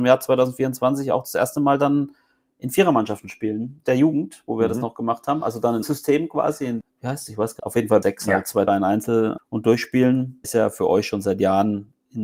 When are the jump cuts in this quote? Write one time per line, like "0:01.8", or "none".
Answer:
0:03.8
0:05.8
0:06.8
0:07.6
0:08.0
0:08.7
0:09.4
0:10.4